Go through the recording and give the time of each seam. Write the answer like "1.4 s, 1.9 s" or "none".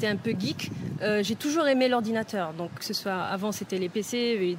2.8 s

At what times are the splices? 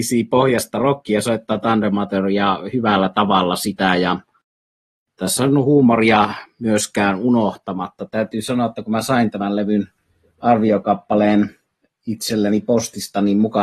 none

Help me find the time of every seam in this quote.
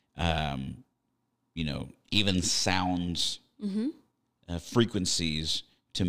none

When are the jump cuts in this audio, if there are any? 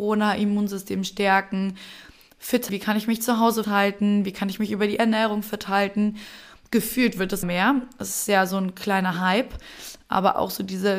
2.7 s, 3.6 s, 7.4 s

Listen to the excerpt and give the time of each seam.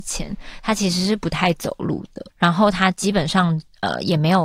2.3 s

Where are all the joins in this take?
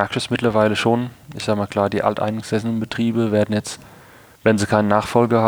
none

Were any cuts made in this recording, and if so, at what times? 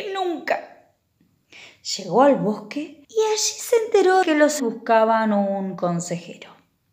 3.0 s, 4.2 s, 4.6 s

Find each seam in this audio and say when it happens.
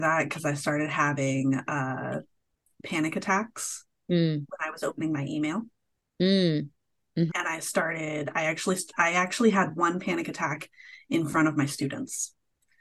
7.3 s

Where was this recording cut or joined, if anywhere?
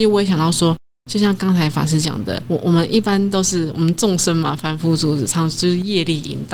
2.4 s

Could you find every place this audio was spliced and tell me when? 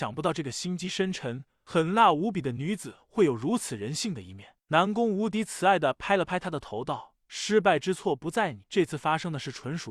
8.6 s

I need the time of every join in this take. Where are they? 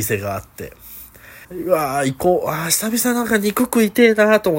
1.4 s

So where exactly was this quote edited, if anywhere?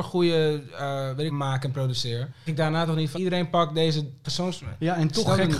1.3 s, 2.5 s, 3.1 s, 4.2 s

